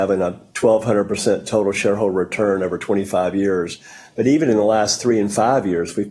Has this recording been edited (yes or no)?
no